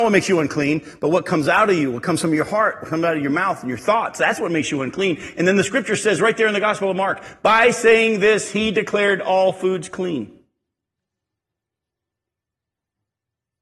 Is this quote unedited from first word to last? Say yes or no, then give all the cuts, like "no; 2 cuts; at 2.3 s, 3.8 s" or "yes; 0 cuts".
yes; 0 cuts